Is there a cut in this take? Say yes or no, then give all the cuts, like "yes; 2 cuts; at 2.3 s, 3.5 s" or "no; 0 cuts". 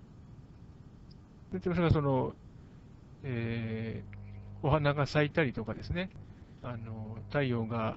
yes; 1 cut; at 6.6 s